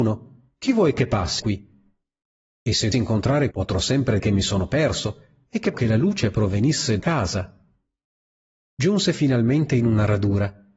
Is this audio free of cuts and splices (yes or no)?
no